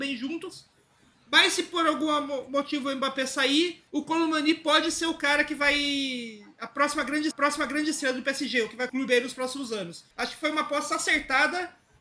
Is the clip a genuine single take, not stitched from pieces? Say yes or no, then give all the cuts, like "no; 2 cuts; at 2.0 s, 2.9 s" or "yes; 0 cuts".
no; 4 cuts; at 3.9 s, 7.3 s, 8.9 s, 10.1 s